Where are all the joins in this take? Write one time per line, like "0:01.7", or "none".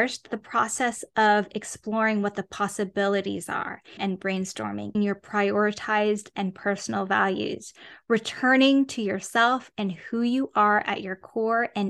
0:04.0
0:04.9